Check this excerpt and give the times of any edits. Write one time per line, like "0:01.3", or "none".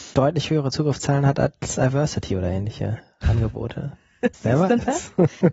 0:04.3